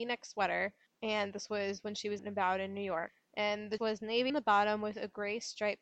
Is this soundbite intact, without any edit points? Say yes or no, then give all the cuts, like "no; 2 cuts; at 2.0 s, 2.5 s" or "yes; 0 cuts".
no; 3 cuts; at 2.2 s, 3.8 s, 4.3 s